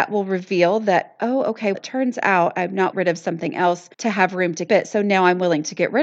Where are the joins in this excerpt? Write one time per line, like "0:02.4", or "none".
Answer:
0:01.7
0:02.9
0:03.9
0:04.7